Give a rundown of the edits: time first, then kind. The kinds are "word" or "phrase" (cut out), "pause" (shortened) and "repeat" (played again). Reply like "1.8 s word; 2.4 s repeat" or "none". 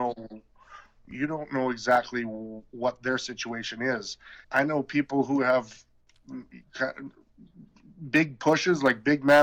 4.4 s pause